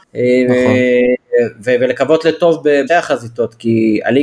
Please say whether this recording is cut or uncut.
cut